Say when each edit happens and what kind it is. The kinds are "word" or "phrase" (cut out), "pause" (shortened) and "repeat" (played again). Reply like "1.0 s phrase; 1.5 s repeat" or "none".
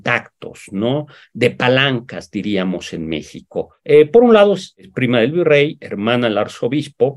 none